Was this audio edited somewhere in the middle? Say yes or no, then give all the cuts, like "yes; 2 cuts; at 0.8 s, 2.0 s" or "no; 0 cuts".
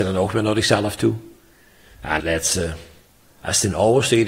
yes; 2 cuts; at 2.2 s, 3.2 s